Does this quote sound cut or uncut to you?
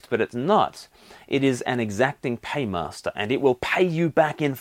uncut